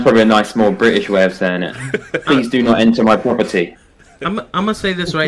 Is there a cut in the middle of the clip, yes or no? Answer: no